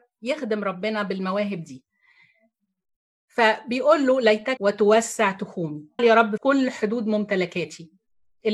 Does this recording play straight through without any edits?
no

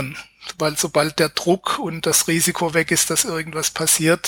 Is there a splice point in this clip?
no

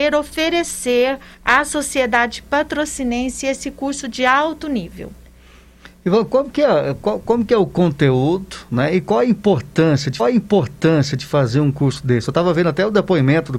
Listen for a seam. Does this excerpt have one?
yes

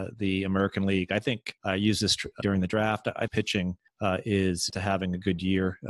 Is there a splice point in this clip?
yes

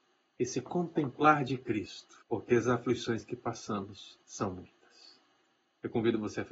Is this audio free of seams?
no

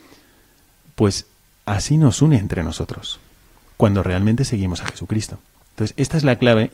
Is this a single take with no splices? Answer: yes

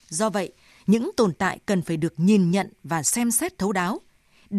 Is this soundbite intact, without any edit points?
yes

